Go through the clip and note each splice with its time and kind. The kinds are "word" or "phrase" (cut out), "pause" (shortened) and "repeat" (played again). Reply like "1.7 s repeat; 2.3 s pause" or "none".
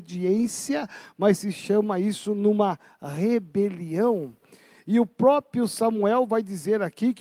none